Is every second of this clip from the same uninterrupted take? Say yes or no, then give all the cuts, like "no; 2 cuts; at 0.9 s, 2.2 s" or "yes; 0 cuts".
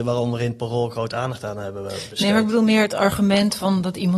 yes; 0 cuts